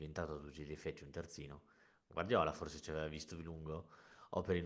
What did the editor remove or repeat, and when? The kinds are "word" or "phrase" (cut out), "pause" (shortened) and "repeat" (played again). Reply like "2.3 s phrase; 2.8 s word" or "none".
none